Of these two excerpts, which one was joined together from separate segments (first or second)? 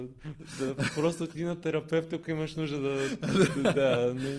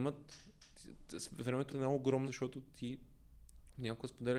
second